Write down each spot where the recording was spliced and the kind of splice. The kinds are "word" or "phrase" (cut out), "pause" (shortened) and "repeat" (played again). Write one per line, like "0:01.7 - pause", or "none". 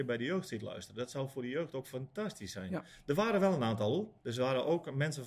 0:04.2 - pause